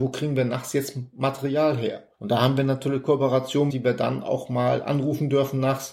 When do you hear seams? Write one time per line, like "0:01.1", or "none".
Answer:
0:02.1
0:03.7